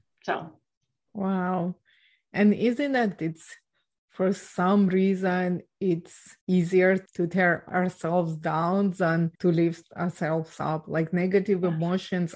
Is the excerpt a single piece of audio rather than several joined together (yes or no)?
no